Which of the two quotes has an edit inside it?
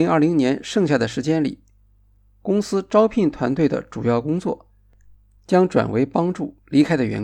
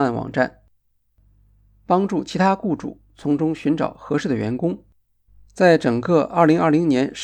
second; 1 cut; at 5.3 s

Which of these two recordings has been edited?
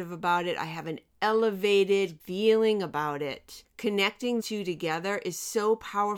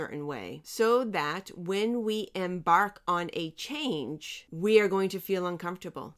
first; 2 cuts; at 2.2 s, 4.4 s

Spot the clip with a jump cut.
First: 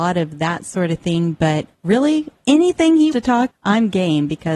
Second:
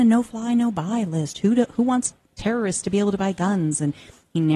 first; 3 cuts; at 1.7 s, 3.1 s, 3.5 s

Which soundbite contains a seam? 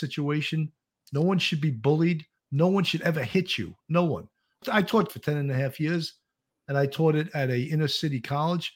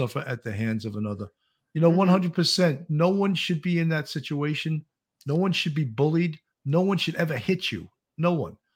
first; 3 cuts; at 3.8 s, 4.6 s, 5.1 s

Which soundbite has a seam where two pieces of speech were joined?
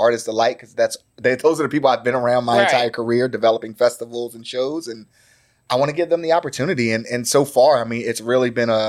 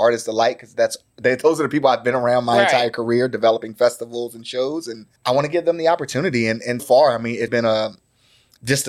second; 3 cuts; at 5.2 s, 6.8 s, 7.5 s

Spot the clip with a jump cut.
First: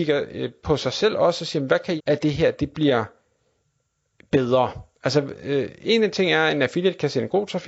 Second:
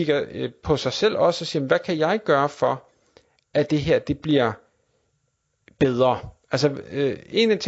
first; 1 cut; at 2.0 s

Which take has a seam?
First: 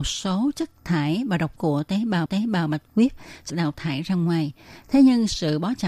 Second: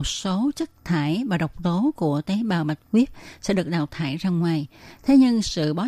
first; 3 cuts; at 1.6 s, 2.3 s, 3.5 s

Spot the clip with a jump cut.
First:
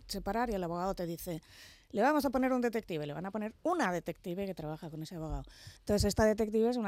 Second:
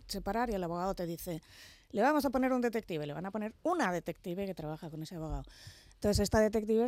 first; 1 cut; at 5.8 s

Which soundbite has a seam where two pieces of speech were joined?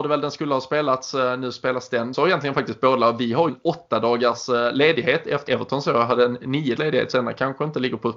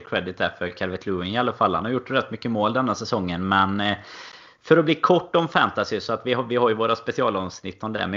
first; 5 cuts; at 2.1 s, 3.5 s, 5.5 s, 6.8 s, 7.1 s

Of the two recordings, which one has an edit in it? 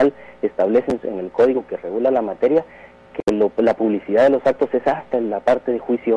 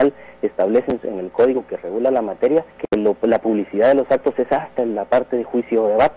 second; 1 cut; at 2.7 s

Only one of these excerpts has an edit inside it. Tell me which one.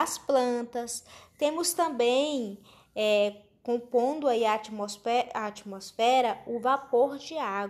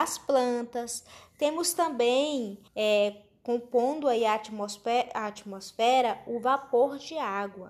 second; 1 cut; at 2.7 s

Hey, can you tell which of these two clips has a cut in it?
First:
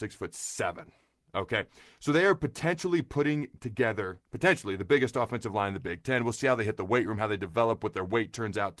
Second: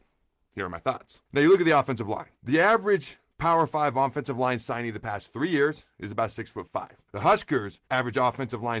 second; 4 cuts; at 1.3 s, 2.3 s, 7.1 s, 7.9 s

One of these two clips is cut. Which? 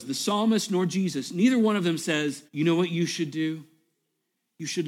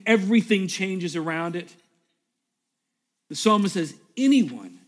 first; 1 cut; at 2.5 s

